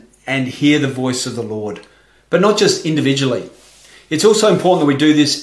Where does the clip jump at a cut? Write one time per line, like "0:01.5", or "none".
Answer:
none